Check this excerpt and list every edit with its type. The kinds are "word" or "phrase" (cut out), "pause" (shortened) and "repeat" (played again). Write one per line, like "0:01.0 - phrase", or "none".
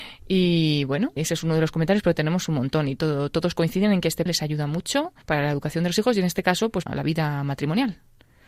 0:01.2 - word
0:04.3 - word
0:05.2 - pause
0:06.9 - word